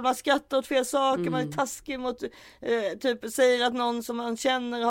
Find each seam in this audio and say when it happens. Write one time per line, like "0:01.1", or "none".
none

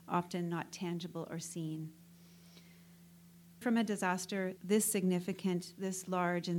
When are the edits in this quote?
0:03.6
0:04.6

